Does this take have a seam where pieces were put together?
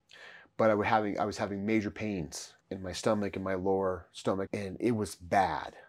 yes; 2 cuts; at 2.6 s, 4.5 s

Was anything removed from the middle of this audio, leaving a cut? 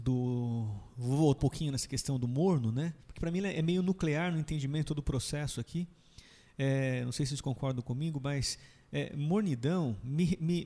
yes; 2 cuts; at 1.4 s, 3.0 s

